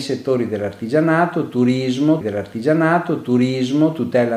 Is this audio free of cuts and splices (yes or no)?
no